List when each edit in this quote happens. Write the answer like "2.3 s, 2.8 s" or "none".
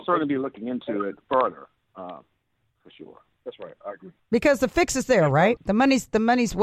4.2 s, 5.6 s